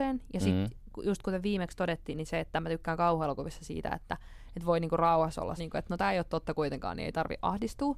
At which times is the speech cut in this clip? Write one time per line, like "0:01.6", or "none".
0:05.6

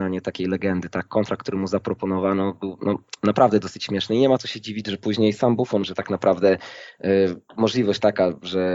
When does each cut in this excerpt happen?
0:05.8
0:07.5

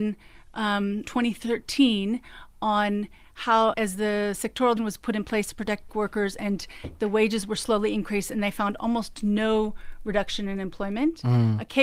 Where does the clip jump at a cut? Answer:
0:01.0
0:03.7
0:04.8
0:05.9

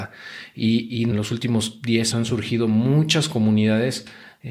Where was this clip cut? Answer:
0:01.1
0:02.1

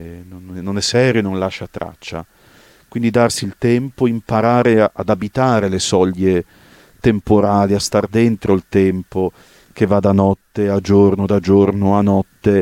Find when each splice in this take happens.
none

